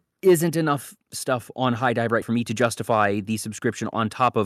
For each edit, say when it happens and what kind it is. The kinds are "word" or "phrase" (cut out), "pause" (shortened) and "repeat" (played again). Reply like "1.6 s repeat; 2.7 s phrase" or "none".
2.2 s word

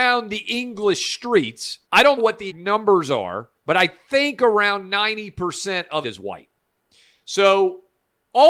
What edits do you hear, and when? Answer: 1.8 s pause; 2.2 s word; 2.5 s word; 3.6 s pause; 6.0 s word

